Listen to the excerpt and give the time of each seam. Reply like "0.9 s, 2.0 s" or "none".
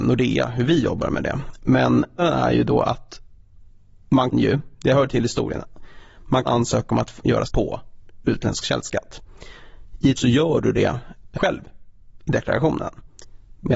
2.2 s, 4.3 s, 6.4 s, 7.4 s, 10.2 s, 11.3 s